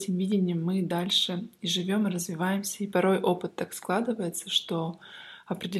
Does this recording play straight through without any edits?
yes; 0 cuts

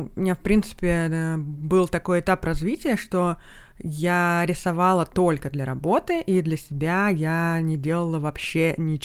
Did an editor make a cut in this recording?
no; 0 cuts

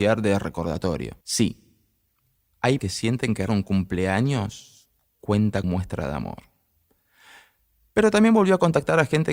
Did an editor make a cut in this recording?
yes; 4 cuts; at 1.2 s, 2.8 s, 3.5 s, 5.6 s

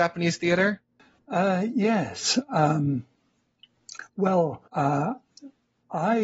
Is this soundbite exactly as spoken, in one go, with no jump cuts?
no; 1 cut; at 4.7 s

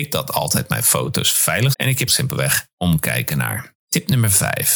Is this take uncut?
no; 3 cuts; at 1.7 s, 2.1 s, 2.7 s

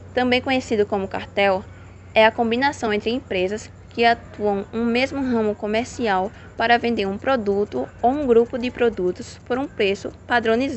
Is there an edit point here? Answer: no; 0 cuts

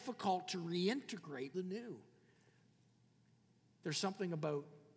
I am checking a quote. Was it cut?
yes; 1 cut; at 1.5 s

